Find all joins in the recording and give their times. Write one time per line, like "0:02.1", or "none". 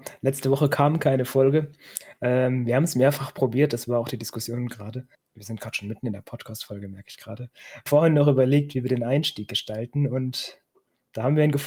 0:05.1
0:07.9